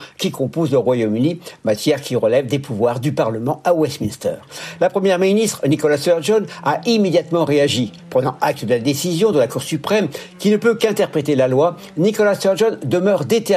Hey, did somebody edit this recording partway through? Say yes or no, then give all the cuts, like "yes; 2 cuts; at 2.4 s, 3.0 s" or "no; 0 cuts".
no; 0 cuts